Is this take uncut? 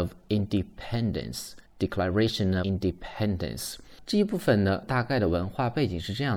no; 2 cuts; at 1.6 s, 2.6 s

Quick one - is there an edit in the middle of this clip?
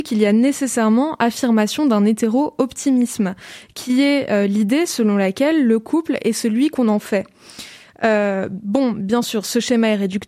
no; 0 cuts

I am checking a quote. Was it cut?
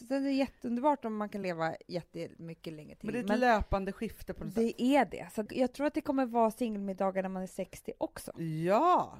no; 0 cuts

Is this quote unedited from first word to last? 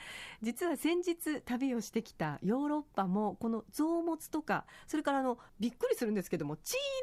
no; 1 cut; at 5.5 s

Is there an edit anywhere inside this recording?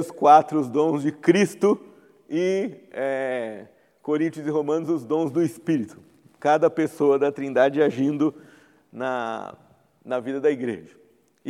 no; 0 cuts

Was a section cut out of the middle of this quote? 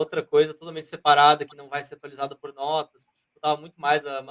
no; 0 cuts

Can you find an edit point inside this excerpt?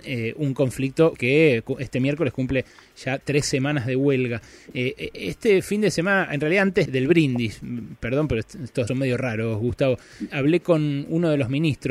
yes; 4 cuts; at 1.2 s, 6.9 s, 8.9 s, 10.3 s

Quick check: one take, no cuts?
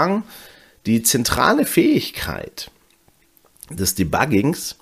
yes; 0 cuts

